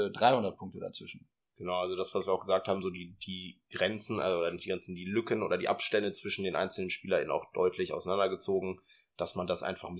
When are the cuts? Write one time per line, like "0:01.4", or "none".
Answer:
none